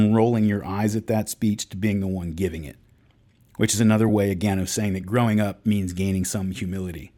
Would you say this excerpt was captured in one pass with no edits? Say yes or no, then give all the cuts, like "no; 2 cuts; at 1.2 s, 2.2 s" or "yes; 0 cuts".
yes; 0 cuts